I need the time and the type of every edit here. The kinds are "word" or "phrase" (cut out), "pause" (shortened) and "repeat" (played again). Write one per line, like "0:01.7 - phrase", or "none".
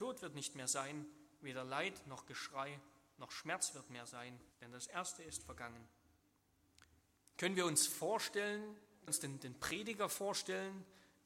0:04.5 - pause
0:07.0 - pause
0:09.1 - phrase